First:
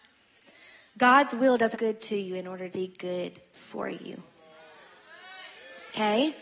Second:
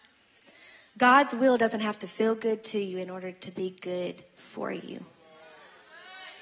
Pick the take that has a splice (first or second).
first